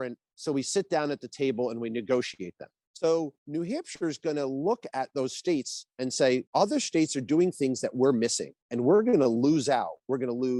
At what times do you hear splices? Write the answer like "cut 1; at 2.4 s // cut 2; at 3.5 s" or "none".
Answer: cut 1; at 3.4 s // cut 2; at 6.5 s // cut 3; at 8.6 s